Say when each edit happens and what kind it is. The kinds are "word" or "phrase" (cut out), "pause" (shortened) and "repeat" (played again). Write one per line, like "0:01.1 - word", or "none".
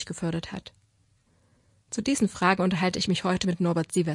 none